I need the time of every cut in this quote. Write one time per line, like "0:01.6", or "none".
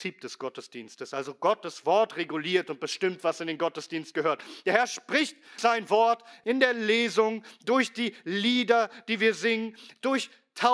0:05.6
0:06.4